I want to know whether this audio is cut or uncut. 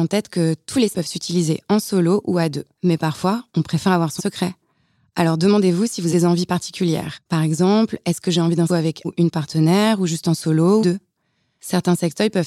cut